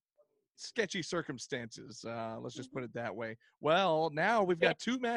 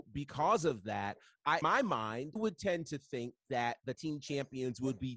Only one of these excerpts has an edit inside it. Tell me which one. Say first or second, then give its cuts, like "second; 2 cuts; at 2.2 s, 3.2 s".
second; 3 cuts; at 1.6 s, 2.4 s, 3.9 s